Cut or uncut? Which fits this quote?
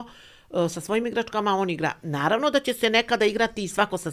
uncut